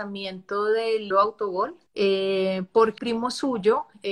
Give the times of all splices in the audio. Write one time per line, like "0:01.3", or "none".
0:01.1
0:01.9
0:03.0